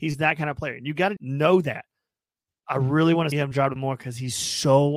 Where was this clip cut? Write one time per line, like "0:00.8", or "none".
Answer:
0:01.2
0:02.5
0:03.3
0:03.8